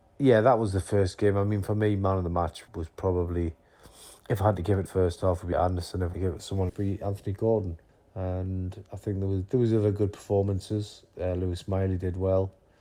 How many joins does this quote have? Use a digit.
7